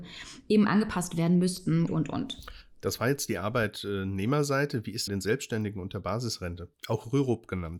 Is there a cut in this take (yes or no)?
yes